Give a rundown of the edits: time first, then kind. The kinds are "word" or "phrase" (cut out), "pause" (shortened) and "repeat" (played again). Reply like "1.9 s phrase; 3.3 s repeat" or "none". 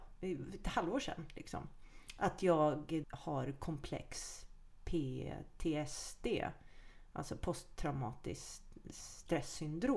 3.0 s word